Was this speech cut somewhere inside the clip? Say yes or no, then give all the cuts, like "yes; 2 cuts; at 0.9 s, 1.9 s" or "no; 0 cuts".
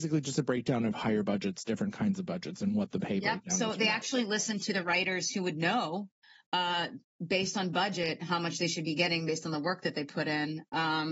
no; 0 cuts